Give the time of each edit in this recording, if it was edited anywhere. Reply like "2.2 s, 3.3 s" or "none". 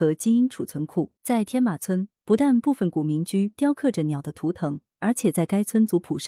1.2 s